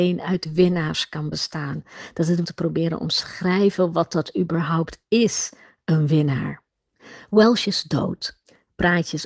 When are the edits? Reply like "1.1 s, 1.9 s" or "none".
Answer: 2.4 s